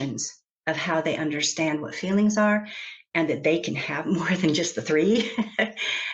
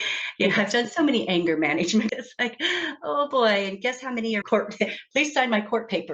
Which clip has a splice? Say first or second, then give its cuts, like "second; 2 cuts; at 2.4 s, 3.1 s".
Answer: second; 2 cuts; at 2.1 s, 4.4 s